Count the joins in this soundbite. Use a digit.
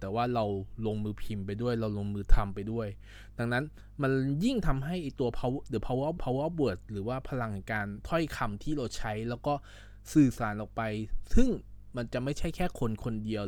1